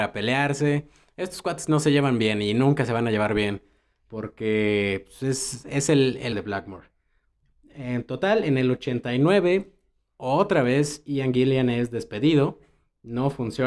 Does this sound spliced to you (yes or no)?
yes